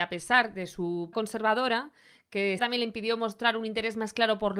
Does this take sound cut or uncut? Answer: cut